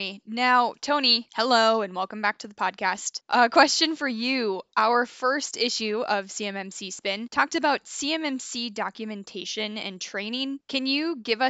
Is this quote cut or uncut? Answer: uncut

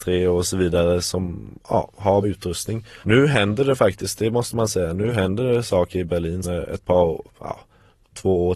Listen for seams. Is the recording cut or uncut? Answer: cut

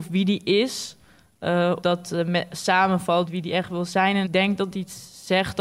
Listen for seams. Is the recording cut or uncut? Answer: cut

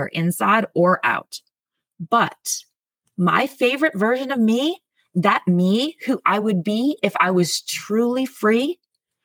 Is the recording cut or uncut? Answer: uncut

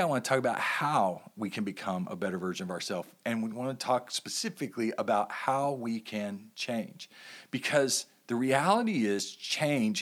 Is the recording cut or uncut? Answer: uncut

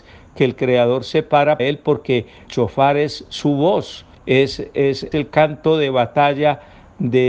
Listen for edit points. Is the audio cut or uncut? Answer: cut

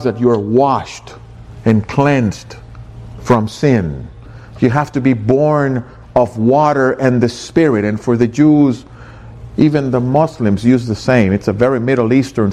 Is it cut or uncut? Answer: uncut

